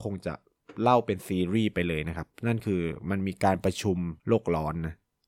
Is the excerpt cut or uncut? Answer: cut